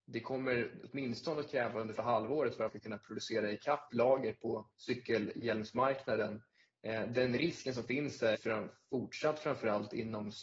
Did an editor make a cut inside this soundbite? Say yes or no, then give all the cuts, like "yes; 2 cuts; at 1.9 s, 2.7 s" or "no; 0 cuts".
yes; 5 cuts; at 2.0 s, 2.7 s, 3.9 s, 4.7 s, 8.3 s